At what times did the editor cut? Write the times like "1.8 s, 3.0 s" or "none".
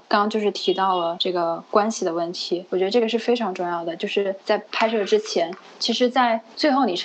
none